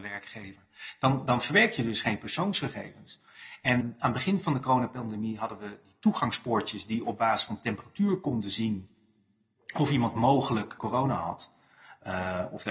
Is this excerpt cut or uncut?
cut